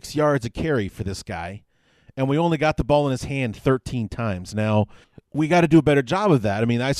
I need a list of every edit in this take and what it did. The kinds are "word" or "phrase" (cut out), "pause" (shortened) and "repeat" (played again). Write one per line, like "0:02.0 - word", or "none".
0:05.0 - pause